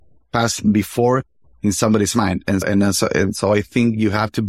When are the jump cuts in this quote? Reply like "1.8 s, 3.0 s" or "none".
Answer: 2.6 s